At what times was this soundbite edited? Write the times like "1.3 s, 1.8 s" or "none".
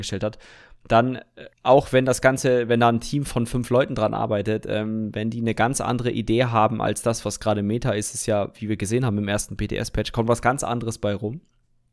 1.5 s